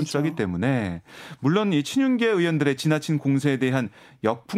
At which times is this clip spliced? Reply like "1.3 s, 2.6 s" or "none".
none